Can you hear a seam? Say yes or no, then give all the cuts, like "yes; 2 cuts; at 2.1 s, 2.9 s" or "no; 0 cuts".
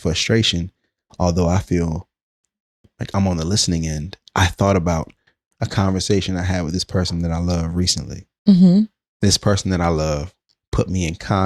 no; 0 cuts